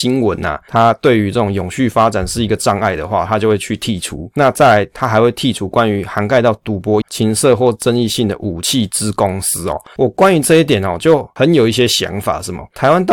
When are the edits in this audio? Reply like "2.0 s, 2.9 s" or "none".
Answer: 7.0 s